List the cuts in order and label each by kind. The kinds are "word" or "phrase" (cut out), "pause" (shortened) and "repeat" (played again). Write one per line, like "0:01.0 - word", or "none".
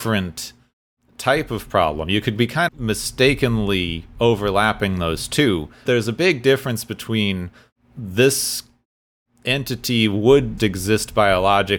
0:02.7 - word
0:05.9 - word
0:10.6 - word